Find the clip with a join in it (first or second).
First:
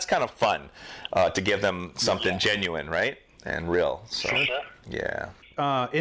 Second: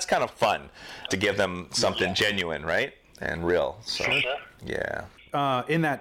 second